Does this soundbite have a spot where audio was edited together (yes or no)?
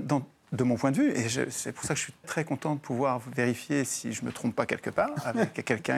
yes